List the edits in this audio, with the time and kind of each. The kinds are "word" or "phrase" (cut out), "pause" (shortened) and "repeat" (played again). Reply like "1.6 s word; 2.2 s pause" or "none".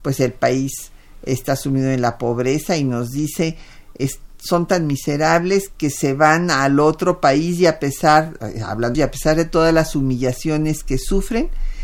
8.4 s word; 8.9 s phrase